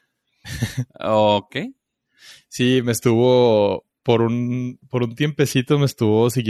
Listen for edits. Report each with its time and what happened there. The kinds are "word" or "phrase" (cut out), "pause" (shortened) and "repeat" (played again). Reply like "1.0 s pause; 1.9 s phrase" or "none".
none

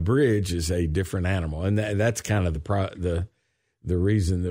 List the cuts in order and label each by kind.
none

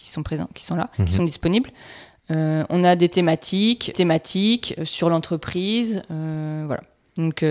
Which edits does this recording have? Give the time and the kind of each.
0.9 s pause; 3.9 s repeat

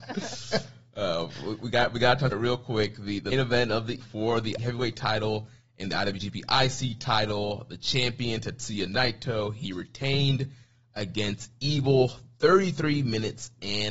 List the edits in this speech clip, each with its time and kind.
2.3 s word; 3.3 s word; 4.0 s word; 4.6 s word

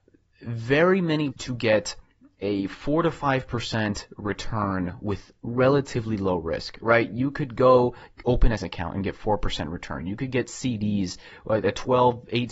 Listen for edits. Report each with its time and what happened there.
1.3 s word; 8.6 s word

